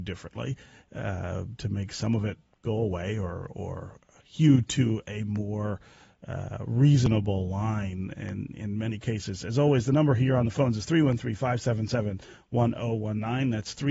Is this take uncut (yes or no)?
yes